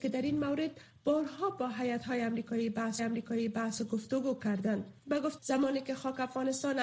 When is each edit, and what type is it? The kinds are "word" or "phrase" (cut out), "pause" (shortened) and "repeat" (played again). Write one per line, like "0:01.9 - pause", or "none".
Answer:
0:03.0 - repeat
0:05.0 - pause
0:05.4 - word